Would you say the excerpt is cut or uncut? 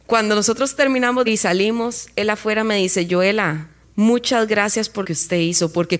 cut